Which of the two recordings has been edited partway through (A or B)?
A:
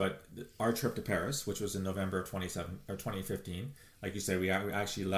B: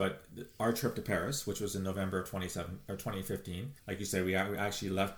B